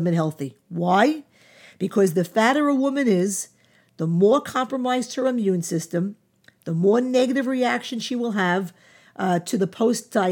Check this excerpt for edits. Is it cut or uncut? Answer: uncut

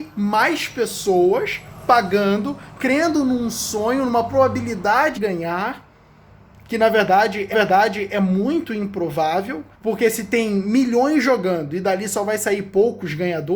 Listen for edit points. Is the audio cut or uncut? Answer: cut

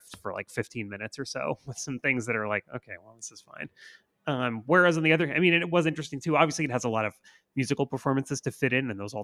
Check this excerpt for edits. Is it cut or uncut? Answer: uncut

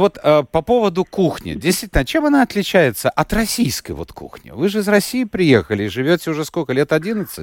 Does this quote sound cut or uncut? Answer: uncut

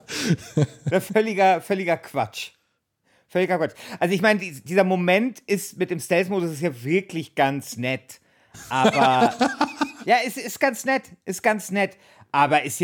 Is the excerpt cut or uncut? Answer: uncut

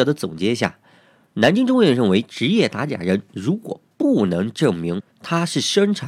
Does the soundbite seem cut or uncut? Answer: cut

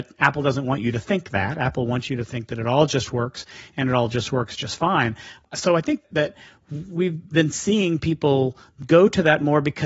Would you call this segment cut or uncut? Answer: uncut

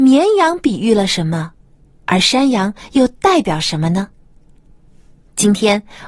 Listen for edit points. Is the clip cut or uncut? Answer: uncut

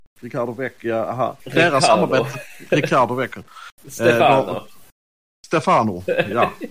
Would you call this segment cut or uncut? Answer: uncut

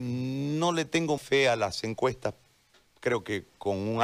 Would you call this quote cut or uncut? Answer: cut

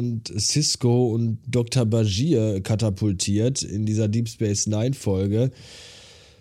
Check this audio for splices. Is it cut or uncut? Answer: uncut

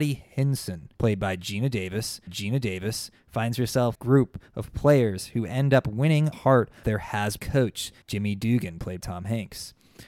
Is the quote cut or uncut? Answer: cut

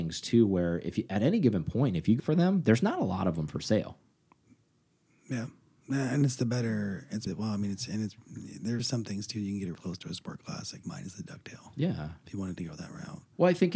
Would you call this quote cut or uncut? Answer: cut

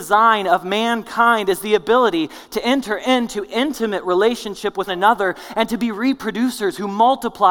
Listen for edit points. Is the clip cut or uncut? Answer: cut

